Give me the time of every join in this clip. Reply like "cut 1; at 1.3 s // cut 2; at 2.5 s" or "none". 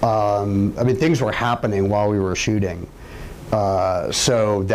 none